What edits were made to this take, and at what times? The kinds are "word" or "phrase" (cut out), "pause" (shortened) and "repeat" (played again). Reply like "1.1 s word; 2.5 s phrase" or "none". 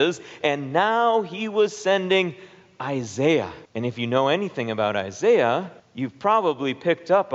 3.7 s pause; 5.8 s pause